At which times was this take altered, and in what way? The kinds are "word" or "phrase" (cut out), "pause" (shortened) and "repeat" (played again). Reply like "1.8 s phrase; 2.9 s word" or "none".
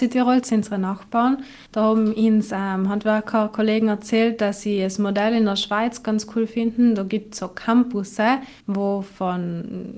1.7 s pause; 8.6 s pause